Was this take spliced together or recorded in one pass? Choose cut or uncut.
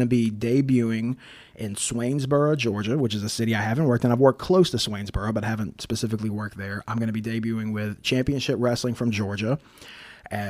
uncut